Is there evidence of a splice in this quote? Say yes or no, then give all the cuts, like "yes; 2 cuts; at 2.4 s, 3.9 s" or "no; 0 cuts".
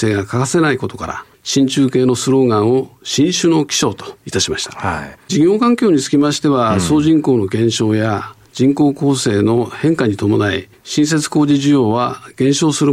yes; 1 cut; at 10.7 s